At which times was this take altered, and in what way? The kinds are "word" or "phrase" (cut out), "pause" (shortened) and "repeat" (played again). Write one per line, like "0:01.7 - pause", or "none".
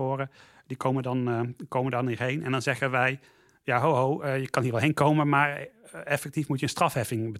none